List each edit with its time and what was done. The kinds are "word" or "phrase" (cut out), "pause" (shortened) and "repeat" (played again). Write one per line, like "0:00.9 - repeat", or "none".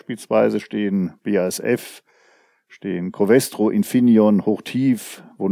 none

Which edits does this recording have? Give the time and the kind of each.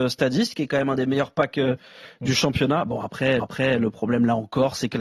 0:03.4 - repeat

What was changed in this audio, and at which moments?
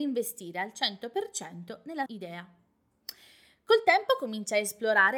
0:02.1 - word

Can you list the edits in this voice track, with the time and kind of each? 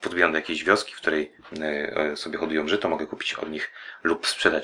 none

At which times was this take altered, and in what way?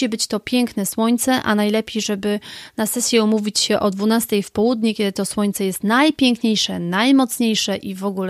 none

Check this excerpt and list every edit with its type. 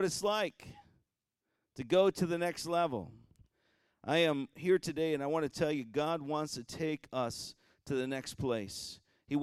none

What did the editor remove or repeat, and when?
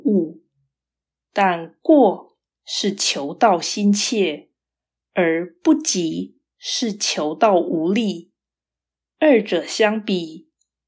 none

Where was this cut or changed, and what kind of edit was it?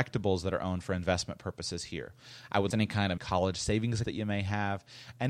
0:02.7 - word
0:03.2 - word
0:04.0 - word

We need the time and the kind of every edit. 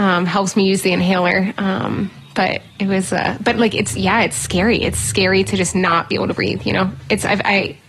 0:02.7 - pause

